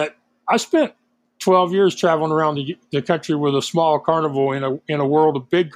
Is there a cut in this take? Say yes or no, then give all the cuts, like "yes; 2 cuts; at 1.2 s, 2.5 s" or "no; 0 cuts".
no; 0 cuts